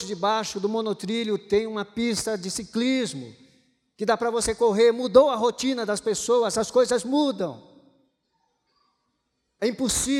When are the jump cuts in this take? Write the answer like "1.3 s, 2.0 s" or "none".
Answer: none